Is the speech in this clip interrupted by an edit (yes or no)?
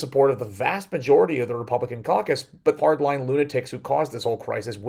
yes